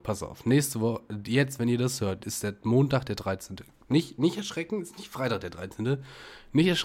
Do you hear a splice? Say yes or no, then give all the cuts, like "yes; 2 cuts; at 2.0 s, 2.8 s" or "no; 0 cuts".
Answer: no; 0 cuts